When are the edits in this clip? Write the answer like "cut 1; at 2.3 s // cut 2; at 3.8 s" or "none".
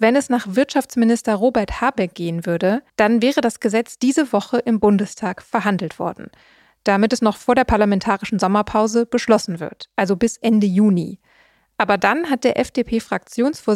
cut 1; at 2.9 s